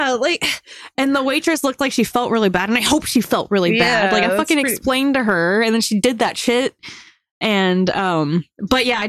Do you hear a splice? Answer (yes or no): no